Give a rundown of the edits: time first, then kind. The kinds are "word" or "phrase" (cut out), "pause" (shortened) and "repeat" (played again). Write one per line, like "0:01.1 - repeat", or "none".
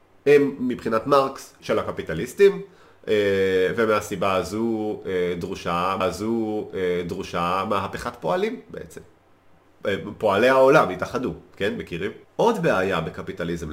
0:01.6 - word
0:06.0 - repeat
0:12.2 - pause

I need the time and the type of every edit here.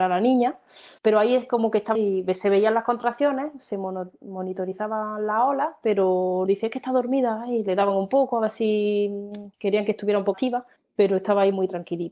0:01.0 - pause
0:01.9 - word
0:06.5 - word
0:09.5 - pause
0:10.3 - word
0:10.8 - pause

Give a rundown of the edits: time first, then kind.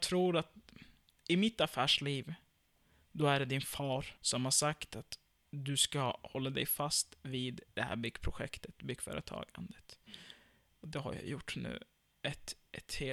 0:04.2 - pause
0:07.7 - pause

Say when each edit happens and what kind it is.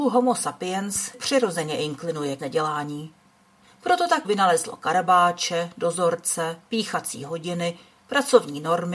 0:01.1 - word
0:02.4 - word
0:04.2 - word

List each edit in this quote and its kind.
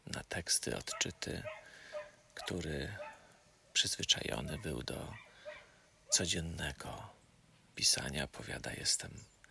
0:07.7 - word

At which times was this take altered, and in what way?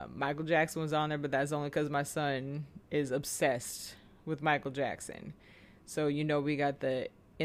0:02.8 - pause

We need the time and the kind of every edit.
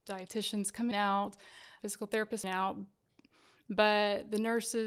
0:00.9 - phrase
0:01.8 - word
0:02.4 - phrase

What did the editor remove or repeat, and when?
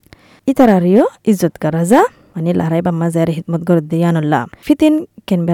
none

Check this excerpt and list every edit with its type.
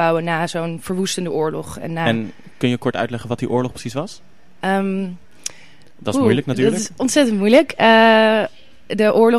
none

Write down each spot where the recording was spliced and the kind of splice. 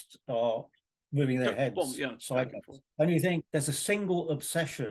0:02.9 - pause
0:03.5 - pause

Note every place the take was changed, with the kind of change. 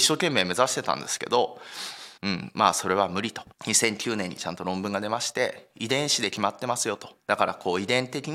0:02.2 - pause
0:03.5 - pause
0:07.2 - pause

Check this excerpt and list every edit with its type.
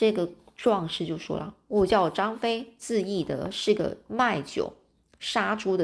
none

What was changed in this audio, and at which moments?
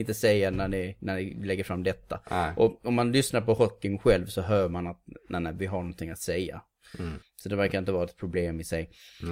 none

